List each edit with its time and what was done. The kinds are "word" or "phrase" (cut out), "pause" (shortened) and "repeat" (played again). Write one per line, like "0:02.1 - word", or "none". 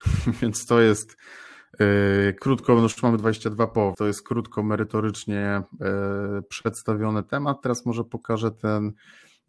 0:03.9 - word